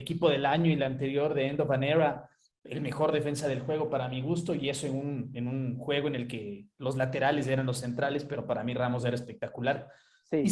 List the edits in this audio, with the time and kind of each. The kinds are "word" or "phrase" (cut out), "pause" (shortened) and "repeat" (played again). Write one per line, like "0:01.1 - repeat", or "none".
none

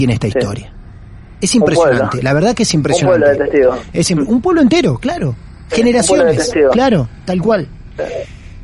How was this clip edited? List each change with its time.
none

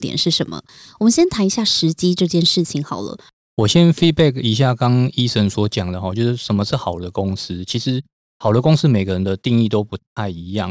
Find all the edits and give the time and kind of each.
none

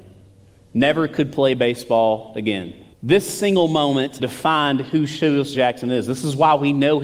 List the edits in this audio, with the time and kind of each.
0:02.9 - pause
0:04.2 - phrase
0:05.5 - word

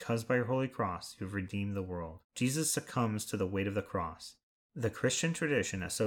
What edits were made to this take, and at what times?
0:02.2 - pause

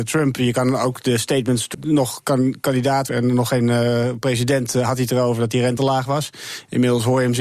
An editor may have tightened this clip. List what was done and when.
0:01.7 - word
0:03.1 - word
0:05.8 - word

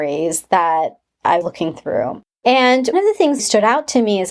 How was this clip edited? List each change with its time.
0:01.4 - word
0:02.9 - word
0:03.4 - phrase

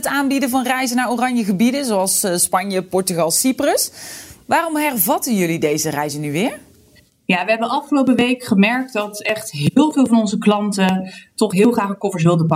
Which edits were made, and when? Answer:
none

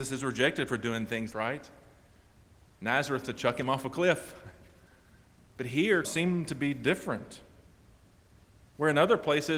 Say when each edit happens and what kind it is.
0:01.3 - phrase
0:03.2 - word
0:06.0 - word

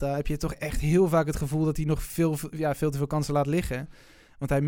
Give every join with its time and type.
none

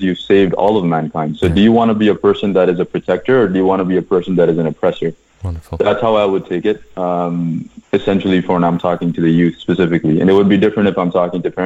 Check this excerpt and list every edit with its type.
none

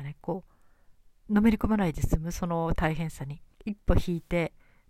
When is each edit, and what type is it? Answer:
0:01.2 - pause
0:03.5 - pause

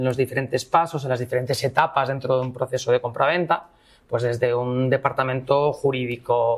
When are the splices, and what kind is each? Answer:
none

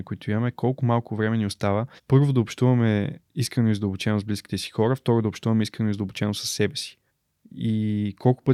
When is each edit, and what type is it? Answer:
0:02.0 - pause
0:03.2 - pause
0:07.1 - pause

